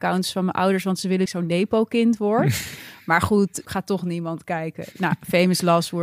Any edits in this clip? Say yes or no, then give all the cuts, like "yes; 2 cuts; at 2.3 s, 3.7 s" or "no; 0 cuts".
yes; 2 cuts; at 1.3 s, 3.6 s